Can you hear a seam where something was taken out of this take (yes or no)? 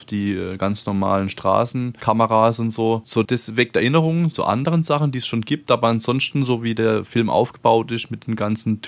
yes